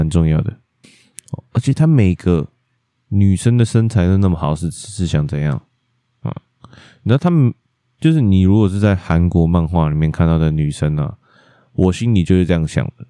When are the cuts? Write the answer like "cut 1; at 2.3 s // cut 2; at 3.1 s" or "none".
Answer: none